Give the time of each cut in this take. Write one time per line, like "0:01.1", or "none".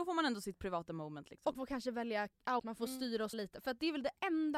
0:01.5
0:02.6
0:03.3